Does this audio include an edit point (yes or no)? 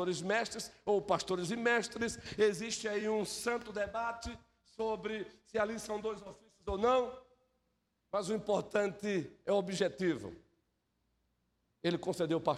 no